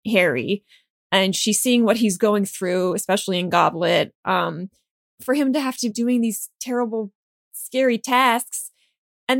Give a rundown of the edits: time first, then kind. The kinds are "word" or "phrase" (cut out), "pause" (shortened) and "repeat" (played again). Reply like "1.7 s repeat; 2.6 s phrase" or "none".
5.0 s word; 5.9 s word